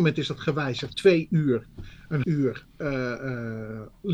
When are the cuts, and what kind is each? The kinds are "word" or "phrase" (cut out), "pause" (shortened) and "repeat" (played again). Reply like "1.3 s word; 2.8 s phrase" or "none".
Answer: 0.9 s word; 2.2 s word